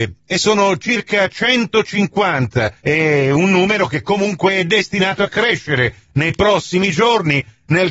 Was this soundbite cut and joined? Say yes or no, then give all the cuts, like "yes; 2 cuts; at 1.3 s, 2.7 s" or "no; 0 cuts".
yes; 1 cut; at 2.8 s